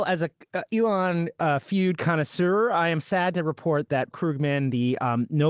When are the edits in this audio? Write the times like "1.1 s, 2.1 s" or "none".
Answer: 4.1 s